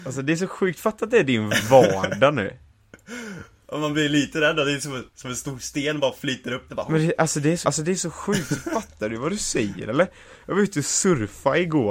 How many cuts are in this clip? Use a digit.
3